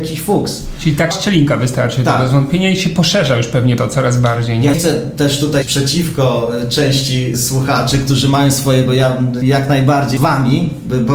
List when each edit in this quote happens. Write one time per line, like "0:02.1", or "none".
0:01.1
0:03.8
0:04.7
0:05.6
0:07.3
0:08.9
0:09.4
0:10.2

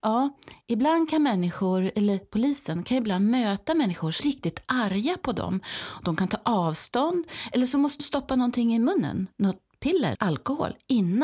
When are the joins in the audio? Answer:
0:04.2
0:08.0
0:10.1

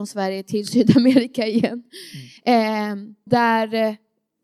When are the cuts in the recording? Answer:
0:02.4
0:03.3

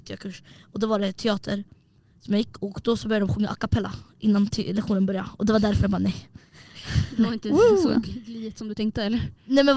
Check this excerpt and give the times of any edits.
none

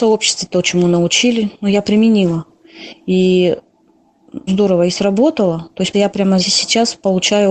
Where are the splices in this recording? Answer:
0:04.5
0:05.9
0:06.4

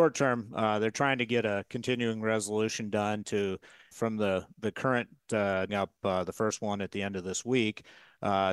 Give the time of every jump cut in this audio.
0:03.9
0:05.7

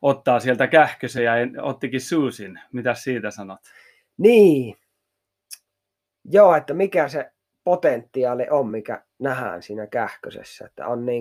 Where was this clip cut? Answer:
none

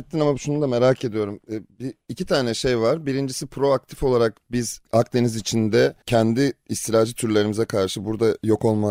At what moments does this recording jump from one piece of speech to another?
none

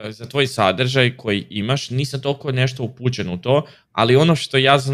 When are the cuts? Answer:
none

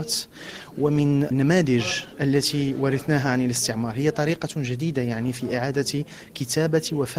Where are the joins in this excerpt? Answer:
none

